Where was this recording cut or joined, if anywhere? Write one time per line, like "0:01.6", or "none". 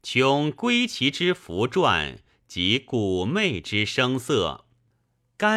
none